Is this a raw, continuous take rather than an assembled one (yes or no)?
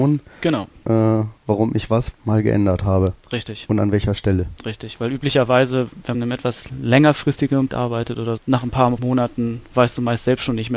no